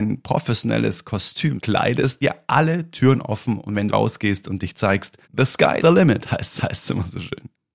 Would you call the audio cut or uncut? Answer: cut